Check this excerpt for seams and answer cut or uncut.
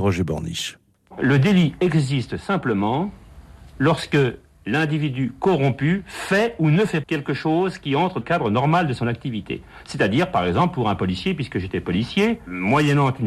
cut